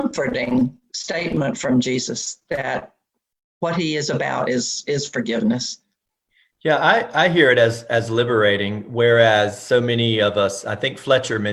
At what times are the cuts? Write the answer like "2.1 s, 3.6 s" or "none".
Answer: none